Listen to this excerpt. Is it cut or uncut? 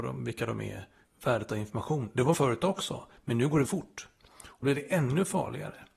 cut